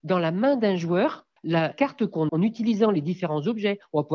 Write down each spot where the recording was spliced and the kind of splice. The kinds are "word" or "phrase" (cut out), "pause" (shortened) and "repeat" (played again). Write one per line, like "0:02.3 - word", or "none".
0:01.7 - word
0:02.3 - word

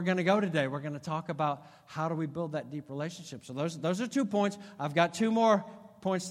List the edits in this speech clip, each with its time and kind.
none

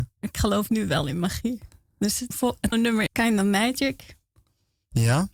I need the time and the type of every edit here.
0:02.3 - word
0:02.7 - word
0:03.1 - word

